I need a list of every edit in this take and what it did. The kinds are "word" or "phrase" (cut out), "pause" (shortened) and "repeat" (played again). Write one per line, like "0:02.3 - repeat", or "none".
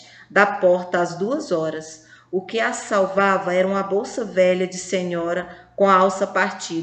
none